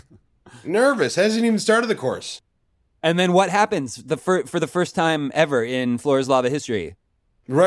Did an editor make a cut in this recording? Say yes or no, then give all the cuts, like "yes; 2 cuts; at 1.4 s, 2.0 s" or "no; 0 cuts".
no; 0 cuts